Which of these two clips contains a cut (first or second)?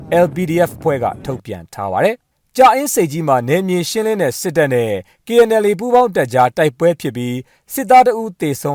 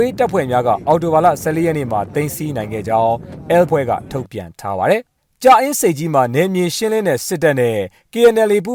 second